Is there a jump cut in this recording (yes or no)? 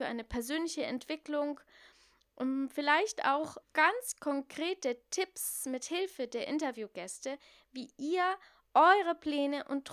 yes